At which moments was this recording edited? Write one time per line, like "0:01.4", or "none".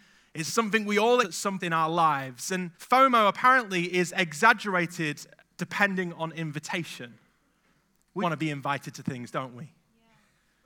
0:01.2
0:01.6
0:02.7
0:08.2